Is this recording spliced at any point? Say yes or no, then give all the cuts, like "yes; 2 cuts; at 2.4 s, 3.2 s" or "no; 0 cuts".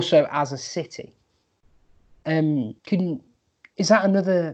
yes; 1 cut; at 2.8 s